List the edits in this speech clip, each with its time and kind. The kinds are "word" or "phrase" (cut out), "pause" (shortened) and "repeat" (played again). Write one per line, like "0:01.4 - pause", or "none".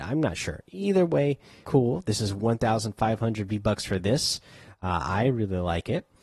0:01.6 - word